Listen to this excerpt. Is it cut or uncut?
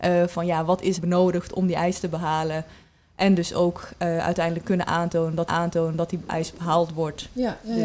cut